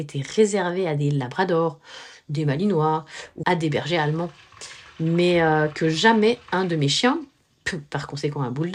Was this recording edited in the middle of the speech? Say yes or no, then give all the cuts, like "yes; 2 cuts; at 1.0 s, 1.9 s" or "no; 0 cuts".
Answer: yes; 1 cut; at 3.4 s